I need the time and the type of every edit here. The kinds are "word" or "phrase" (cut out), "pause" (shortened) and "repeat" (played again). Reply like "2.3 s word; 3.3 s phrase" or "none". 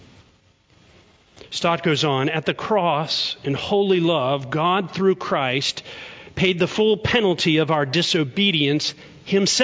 none